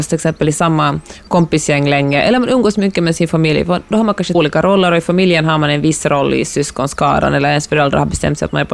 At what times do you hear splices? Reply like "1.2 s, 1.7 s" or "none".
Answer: 4.3 s